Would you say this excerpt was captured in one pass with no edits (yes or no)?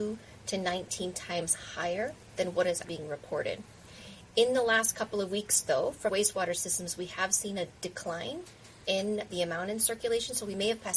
no